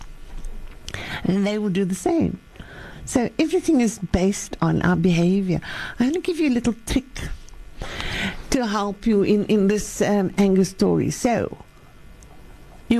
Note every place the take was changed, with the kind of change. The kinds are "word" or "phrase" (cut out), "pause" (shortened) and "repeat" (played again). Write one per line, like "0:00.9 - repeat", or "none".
none